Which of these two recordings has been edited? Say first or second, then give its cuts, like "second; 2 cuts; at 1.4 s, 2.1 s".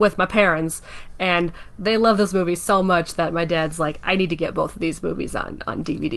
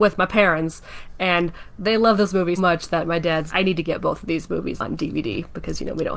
second; 3 cuts; at 2.6 s, 3.5 s, 4.8 s